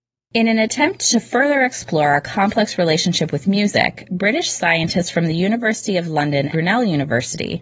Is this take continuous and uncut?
no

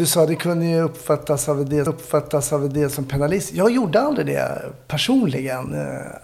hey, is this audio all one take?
no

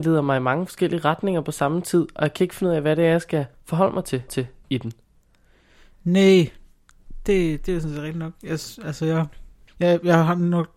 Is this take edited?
yes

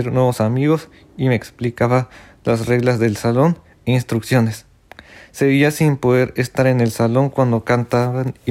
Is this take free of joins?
yes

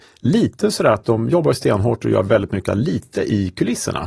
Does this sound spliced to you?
yes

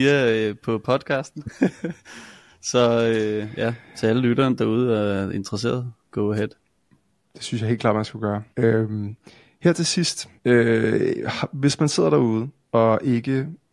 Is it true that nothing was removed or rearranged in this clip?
no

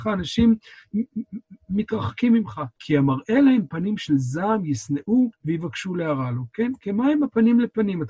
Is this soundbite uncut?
no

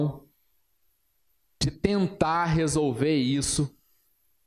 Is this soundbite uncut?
yes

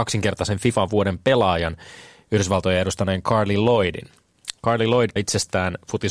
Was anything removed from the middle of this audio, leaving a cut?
yes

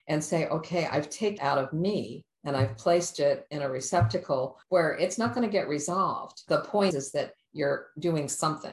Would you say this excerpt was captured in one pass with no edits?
no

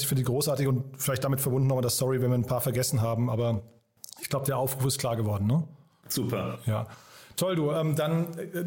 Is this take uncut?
yes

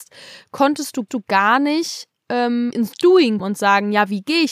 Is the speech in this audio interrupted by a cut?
yes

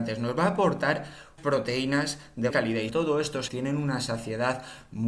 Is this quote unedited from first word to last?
no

